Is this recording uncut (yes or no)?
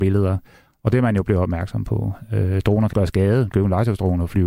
no